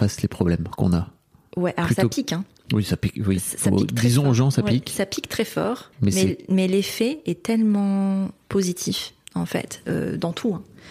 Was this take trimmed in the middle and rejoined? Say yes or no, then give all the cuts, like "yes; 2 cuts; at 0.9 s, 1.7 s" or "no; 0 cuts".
yes; 1 cut; at 5.9 s